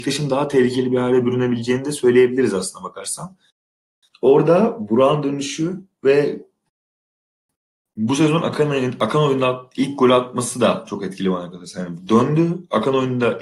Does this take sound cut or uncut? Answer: uncut